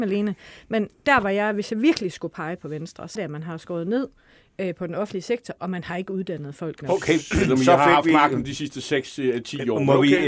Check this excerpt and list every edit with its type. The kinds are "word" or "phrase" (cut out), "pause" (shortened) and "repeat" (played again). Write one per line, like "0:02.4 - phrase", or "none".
0:03.2 - word